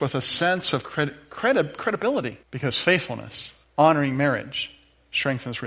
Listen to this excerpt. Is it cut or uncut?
cut